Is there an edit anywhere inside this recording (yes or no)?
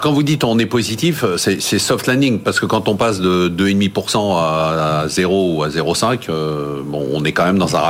no